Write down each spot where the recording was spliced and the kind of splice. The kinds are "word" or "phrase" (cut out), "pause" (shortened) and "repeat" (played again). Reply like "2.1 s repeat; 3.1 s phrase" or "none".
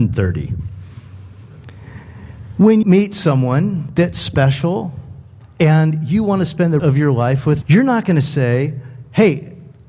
2.8 s word; 6.8 s word; 7.6 s word